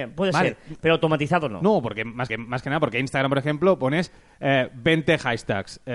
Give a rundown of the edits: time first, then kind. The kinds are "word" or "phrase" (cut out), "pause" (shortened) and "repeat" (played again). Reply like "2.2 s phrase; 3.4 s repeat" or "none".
2.3 s repeat